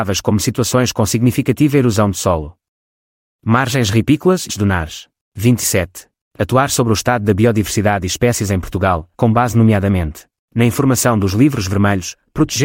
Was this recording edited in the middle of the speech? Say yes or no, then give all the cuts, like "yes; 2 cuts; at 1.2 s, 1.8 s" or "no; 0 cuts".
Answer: yes; 2 cuts; at 4.5 s, 9.1 s